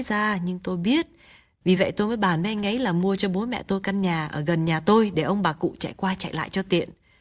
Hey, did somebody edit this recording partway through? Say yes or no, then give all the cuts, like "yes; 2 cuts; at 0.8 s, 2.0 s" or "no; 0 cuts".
no; 0 cuts